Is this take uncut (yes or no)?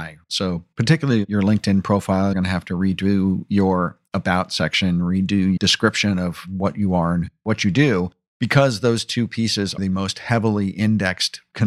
no